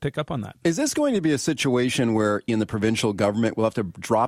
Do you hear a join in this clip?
yes; 1 cut; at 2.5 s

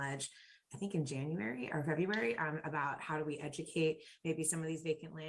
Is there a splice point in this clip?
no; 0 cuts

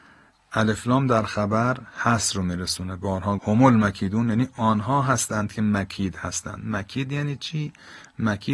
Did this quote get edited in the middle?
yes; 1 cut; at 3.4 s

